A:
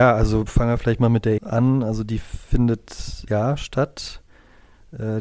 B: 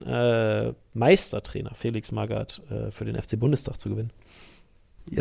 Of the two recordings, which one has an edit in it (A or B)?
A